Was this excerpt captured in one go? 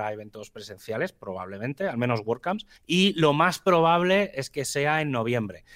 no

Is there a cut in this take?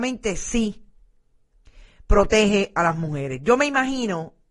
no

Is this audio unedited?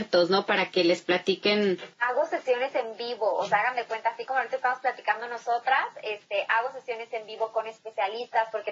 no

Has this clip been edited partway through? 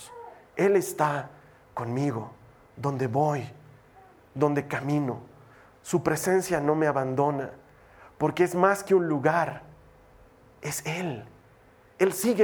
no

